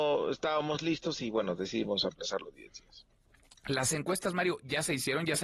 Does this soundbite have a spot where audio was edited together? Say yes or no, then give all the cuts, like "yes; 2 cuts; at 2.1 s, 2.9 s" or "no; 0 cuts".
no; 0 cuts